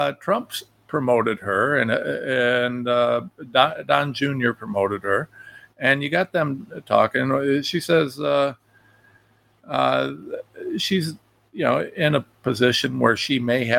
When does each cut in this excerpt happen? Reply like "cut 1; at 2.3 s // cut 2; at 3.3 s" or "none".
none

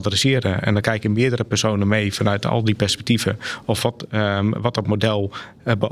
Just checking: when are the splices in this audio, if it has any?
none

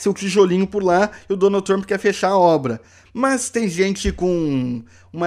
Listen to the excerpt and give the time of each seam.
none

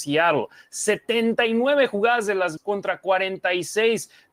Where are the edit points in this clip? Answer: cut 1; at 2.6 s

